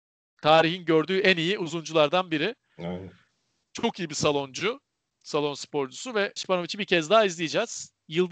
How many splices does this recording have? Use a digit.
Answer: 1